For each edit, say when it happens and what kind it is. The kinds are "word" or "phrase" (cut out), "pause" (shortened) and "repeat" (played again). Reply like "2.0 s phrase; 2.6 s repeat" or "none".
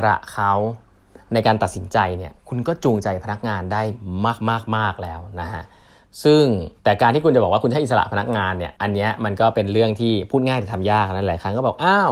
6.8 s pause; 8.8 s pause